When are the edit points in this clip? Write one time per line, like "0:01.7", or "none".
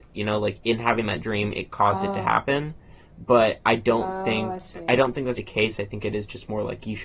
0:05.4